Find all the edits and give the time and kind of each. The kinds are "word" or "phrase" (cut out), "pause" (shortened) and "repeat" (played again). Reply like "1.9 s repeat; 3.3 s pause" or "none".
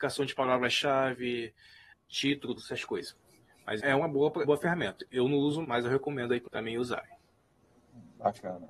1.9 s word; 2.6 s word; 3.8 s word; 4.4 s word; 5.6 s word; 6.5 s word